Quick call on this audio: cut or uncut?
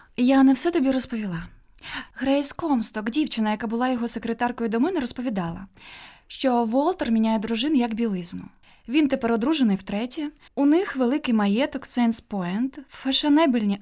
cut